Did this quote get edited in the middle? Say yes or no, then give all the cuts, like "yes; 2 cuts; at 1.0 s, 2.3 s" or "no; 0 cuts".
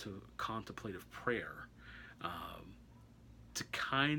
no; 0 cuts